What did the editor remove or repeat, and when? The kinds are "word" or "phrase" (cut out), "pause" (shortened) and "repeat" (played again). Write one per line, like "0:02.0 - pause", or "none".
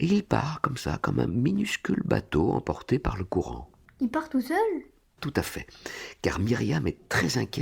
0:05.2 - word